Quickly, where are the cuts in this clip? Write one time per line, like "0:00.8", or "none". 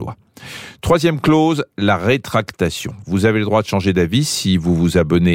none

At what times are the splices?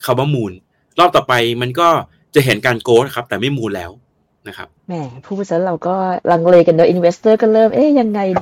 0:04.8

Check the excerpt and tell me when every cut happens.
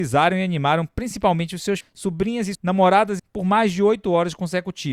0:01.8
0:02.5
0:03.2

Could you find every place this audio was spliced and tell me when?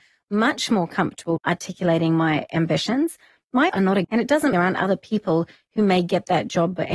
0:01.4
0:03.7
0:04.0
0:04.5

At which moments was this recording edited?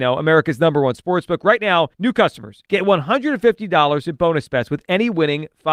0:01.9
0:02.7

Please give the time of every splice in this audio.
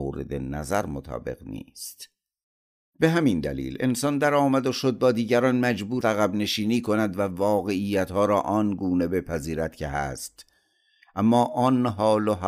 0:02.4
0:06.0

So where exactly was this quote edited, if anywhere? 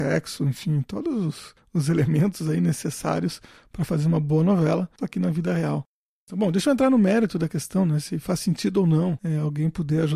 none

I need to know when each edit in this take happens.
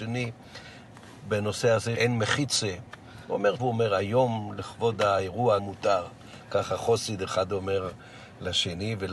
0:01.9
0:03.6
0:05.6

